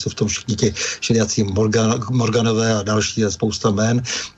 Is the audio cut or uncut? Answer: uncut